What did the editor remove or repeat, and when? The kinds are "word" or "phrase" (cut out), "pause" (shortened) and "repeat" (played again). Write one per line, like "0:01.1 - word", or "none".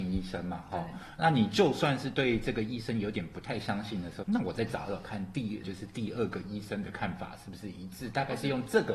0:04.2 - phrase
0:05.6 - phrase